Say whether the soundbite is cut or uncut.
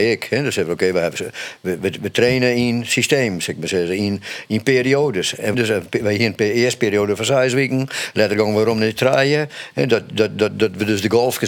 cut